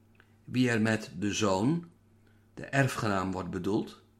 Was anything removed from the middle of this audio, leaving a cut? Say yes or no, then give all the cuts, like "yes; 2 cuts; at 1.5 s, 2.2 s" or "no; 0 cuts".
no; 0 cuts